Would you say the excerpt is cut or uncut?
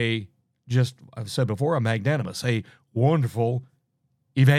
uncut